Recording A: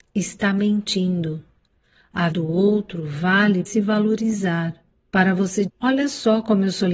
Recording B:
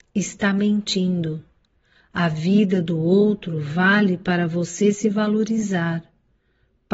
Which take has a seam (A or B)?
A